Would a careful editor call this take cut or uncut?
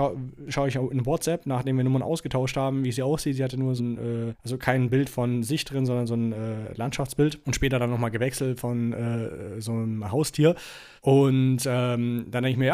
cut